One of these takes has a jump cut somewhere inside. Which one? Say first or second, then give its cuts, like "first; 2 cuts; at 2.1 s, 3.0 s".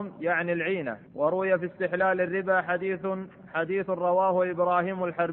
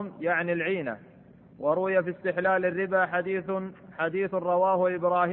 first; 1 cut; at 1.1 s